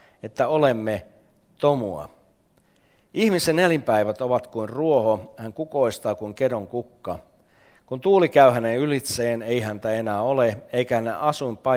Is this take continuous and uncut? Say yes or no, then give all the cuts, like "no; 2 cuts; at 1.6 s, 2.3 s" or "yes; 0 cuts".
yes; 0 cuts